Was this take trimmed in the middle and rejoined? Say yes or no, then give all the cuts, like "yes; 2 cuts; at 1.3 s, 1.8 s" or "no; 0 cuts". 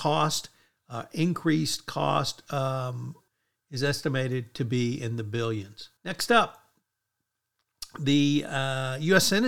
yes; 1 cut; at 6.0 s